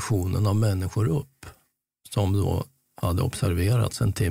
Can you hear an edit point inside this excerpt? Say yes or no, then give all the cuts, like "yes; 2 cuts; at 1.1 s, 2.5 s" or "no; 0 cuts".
no; 0 cuts